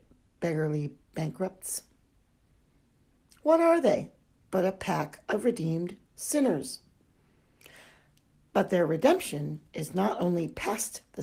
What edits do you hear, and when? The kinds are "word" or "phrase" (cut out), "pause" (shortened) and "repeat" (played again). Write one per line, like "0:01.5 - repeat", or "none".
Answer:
none